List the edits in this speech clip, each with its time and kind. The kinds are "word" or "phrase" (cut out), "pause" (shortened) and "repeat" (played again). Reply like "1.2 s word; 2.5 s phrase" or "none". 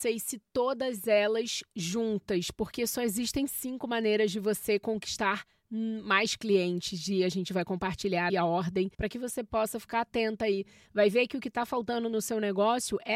8.3 s word; 8.9 s pause